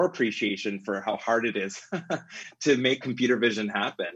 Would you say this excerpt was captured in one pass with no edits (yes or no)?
no